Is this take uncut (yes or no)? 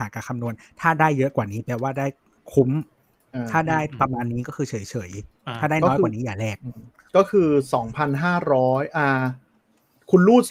yes